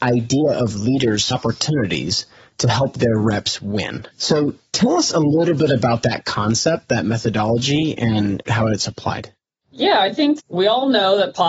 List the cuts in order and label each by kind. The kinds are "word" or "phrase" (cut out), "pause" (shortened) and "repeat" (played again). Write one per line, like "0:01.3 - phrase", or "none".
0:01.3 - word
0:04.1 - pause